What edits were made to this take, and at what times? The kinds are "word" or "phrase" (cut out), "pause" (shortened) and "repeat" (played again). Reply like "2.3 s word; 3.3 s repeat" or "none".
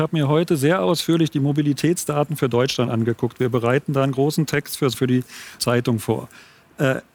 4.9 s word; 5.6 s word